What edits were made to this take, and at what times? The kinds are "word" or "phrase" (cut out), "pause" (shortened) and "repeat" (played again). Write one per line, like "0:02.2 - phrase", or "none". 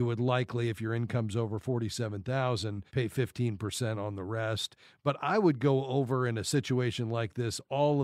0:02.9 - pause